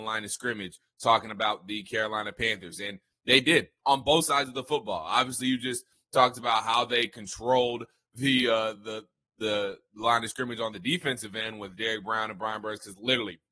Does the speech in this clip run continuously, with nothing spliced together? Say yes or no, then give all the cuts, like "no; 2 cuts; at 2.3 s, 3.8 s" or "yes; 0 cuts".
yes; 0 cuts